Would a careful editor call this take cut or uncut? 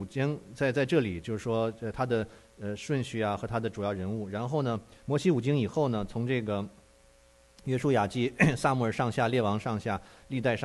uncut